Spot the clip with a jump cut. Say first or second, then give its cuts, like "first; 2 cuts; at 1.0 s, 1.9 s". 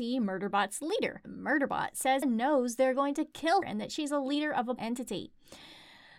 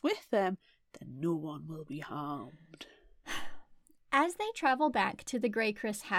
first; 4 cuts; at 1.2 s, 2.2 s, 3.6 s, 4.8 s